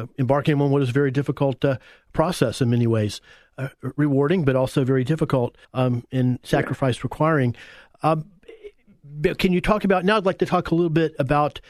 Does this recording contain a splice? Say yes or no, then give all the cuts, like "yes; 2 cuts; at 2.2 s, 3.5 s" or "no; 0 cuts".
yes; 1 cut; at 5.6 s